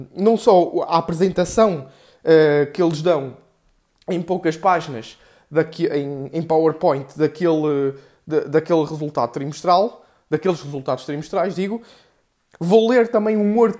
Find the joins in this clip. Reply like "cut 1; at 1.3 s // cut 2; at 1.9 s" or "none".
none